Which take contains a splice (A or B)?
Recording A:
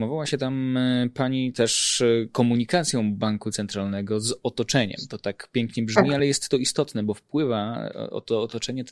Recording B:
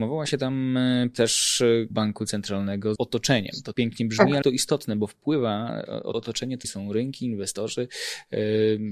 B